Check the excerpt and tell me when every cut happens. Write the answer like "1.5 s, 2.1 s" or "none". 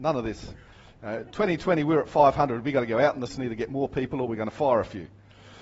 3.3 s